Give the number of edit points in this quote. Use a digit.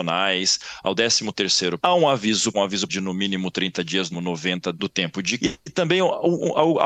6